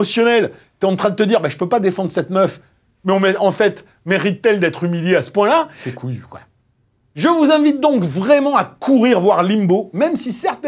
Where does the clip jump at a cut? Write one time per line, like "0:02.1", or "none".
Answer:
none